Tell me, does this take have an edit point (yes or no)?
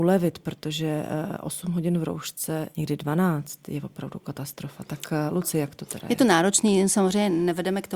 no